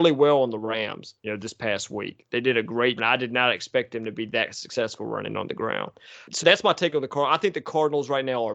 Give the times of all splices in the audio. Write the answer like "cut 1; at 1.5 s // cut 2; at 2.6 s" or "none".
cut 1; at 1.2 s // cut 2; at 3.0 s // cut 3; at 6.4 s